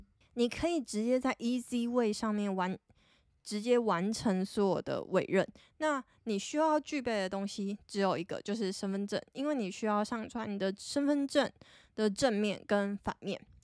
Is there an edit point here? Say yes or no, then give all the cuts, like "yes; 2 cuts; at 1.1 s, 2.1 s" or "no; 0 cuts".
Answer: no; 0 cuts